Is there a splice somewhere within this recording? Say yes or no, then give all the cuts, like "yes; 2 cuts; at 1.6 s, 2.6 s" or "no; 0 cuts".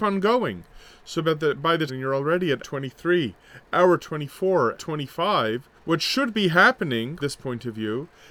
yes; 5 cuts; at 1.9 s, 2.6 s, 4.8 s, 5.8 s, 7.2 s